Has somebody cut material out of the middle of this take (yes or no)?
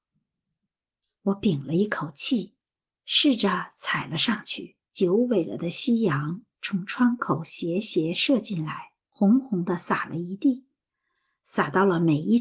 yes